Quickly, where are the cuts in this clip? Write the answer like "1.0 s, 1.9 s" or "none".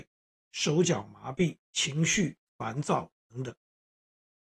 1.6 s